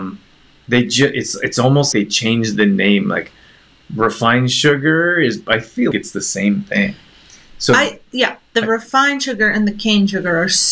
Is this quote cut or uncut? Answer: cut